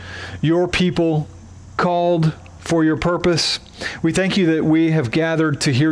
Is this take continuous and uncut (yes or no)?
yes